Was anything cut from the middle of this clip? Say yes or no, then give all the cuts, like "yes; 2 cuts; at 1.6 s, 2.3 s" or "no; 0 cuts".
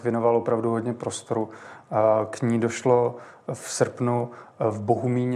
no; 0 cuts